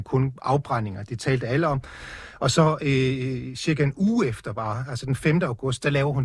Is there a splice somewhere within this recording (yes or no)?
no